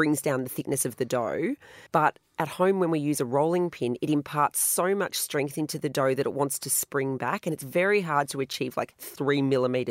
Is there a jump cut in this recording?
yes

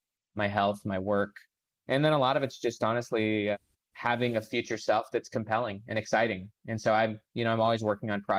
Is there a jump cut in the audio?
no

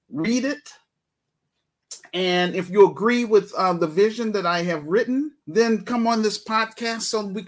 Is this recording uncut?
no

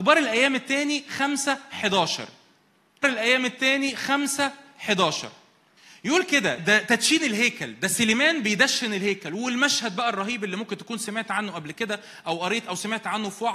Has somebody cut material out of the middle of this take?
yes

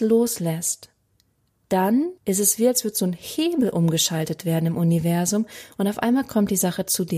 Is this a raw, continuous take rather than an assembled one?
no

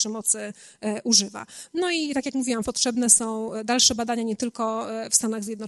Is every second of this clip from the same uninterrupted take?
no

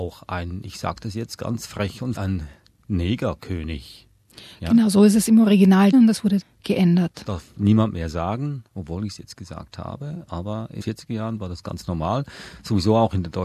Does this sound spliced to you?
yes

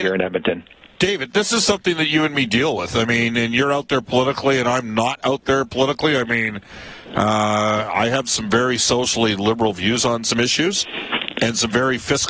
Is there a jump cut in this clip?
no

